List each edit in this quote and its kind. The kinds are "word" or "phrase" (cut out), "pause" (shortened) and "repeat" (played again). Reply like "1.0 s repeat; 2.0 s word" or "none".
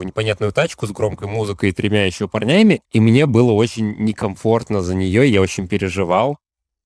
2.8 s pause

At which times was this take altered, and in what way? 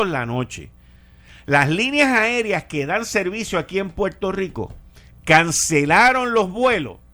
none

